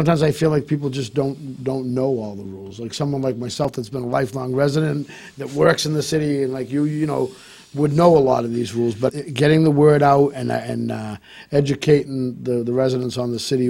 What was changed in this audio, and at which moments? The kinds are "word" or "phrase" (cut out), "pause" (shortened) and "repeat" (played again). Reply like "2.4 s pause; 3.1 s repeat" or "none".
9.1 s word